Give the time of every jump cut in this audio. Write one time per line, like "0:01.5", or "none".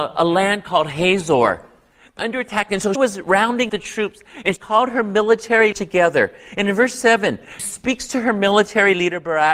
0:02.2
0:03.0
0:03.7
0:04.6
0:05.7
0:07.6